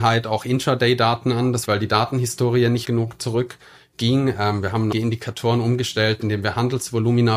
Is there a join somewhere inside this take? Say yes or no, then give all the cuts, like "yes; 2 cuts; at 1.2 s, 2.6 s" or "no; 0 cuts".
yes; 3 cuts; at 1.6 s, 2.8 s, 4.9 s